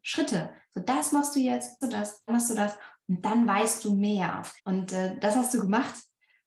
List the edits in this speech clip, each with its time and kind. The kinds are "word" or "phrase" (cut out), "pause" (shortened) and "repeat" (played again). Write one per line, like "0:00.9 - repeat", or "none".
0:01.8 - phrase
0:02.3 - phrase
0:04.6 - pause